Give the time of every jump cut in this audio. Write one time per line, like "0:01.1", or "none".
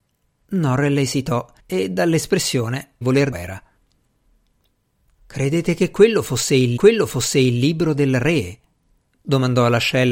0:01.6
0:03.0
0:03.3
0:06.8